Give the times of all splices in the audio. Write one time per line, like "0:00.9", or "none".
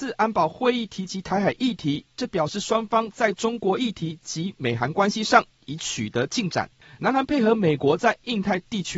none